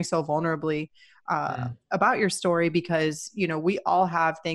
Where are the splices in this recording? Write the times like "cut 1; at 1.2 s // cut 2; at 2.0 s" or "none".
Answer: none